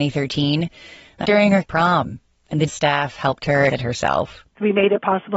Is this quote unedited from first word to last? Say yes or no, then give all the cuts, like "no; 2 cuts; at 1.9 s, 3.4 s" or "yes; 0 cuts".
no; 4 cuts; at 1.2 s, 1.6 s, 2.7 s, 3.7 s